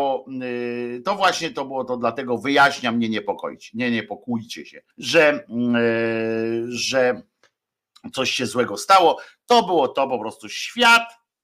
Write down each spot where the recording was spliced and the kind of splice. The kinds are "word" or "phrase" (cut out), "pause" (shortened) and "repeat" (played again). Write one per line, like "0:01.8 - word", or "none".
0:04.9 - pause